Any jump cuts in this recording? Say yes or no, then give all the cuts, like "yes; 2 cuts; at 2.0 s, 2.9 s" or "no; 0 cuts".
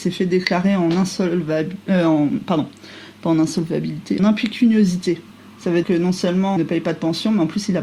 yes; 3 cuts; at 4.2 s, 5.8 s, 6.6 s